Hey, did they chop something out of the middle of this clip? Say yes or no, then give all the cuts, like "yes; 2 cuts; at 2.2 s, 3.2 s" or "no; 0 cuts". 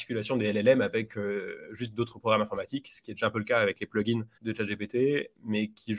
yes; 1 cut; at 4.3 s